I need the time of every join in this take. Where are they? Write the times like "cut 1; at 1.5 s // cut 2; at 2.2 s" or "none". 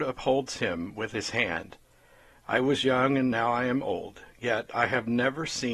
none